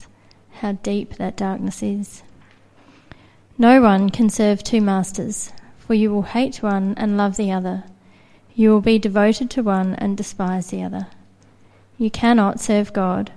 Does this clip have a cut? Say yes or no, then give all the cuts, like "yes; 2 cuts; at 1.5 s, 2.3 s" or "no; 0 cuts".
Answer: no; 0 cuts